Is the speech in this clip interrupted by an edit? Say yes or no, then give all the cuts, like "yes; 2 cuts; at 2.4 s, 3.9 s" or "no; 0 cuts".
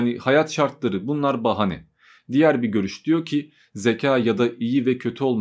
no; 0 cuts